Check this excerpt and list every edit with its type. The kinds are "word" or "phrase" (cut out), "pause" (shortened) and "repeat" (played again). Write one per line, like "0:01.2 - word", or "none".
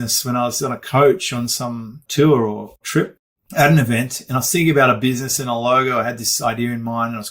none

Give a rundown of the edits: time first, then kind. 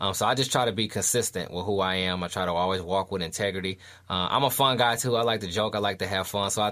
none

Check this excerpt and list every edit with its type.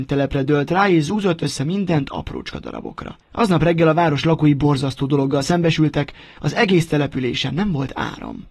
0:03.2 - pause

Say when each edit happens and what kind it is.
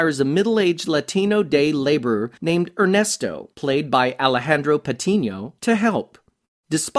0:02.4 - pause
0:03.5 - pause
0:05.6 - pause

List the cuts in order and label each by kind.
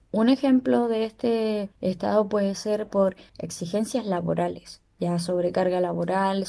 0:01.7 - pause
0:03.3 - pause

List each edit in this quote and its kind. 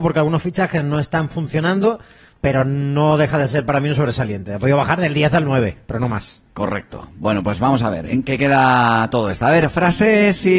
0:06.5 - pause

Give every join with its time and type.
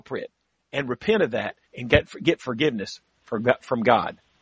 0:01.6 - pause

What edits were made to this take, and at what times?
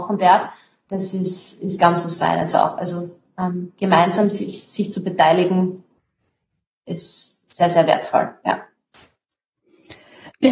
none

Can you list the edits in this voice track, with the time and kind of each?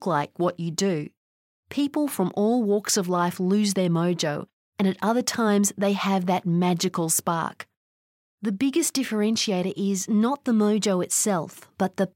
none

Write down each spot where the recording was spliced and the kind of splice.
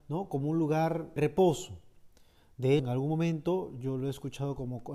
0:01.2 - word
0:02.8 - word

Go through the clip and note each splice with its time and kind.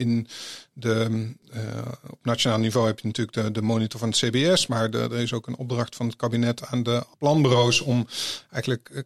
0:07.1 - pause

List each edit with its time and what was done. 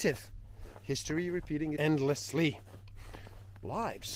0:01.8 - word

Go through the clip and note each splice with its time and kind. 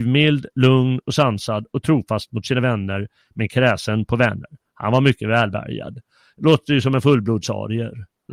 none

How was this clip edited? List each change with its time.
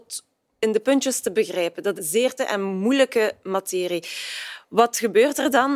0:02.0 - word
0:02.4 - word

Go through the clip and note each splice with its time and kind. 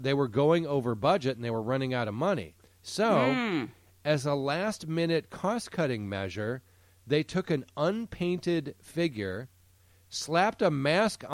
none

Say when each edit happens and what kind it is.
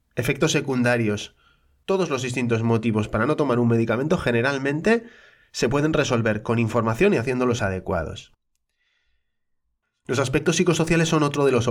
0:07.6 - word

